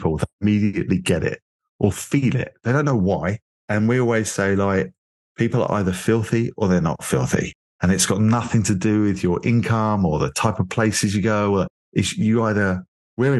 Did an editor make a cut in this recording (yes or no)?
no